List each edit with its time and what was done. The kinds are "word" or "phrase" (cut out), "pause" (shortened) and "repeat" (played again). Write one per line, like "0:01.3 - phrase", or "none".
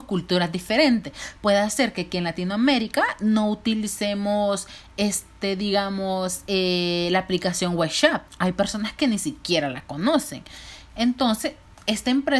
0:08.3 - pause